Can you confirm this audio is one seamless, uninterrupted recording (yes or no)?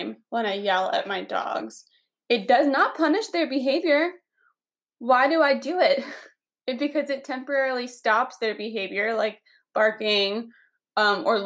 yes